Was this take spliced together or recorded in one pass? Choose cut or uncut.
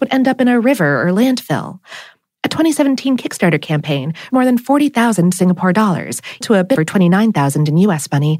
cut